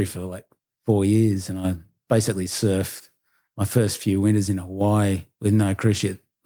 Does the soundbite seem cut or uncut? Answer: uncut